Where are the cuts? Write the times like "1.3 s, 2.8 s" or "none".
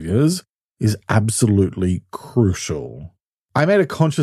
none